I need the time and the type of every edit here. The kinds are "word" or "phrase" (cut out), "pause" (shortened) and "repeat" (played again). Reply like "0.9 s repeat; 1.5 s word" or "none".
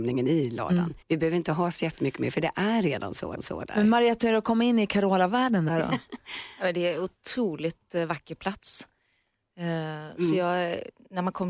1.0 s pause; 3.4 s repeat

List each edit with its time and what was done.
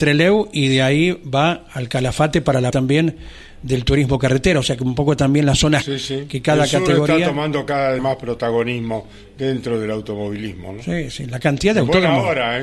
2.7 s word; 5.8 s word; 8.0 s word

